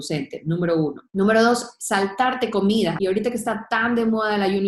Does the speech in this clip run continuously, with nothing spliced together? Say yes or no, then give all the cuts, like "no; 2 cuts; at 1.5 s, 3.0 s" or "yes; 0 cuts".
no; 2 cuts; at 1.1 s, 3.0 s